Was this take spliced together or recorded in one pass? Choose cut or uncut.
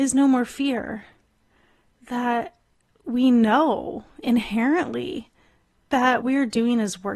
cut